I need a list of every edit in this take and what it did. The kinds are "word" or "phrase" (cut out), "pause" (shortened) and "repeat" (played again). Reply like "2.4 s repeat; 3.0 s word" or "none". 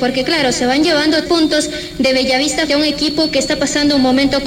1.3 s word; 2.7 s word